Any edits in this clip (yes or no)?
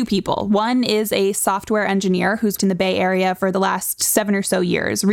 yes